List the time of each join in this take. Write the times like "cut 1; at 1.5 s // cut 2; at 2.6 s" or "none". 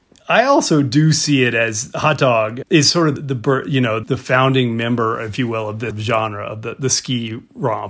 cut 1; at 2.6 s // cut 2; at 3.2 s // cut 3; at 4.0 s // cut 4; at 5.9 s